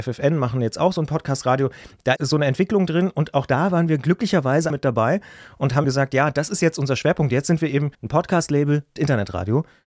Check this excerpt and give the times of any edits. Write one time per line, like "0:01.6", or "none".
0:02.2
0:04.7
0:05.8
0:07.9
0:09.0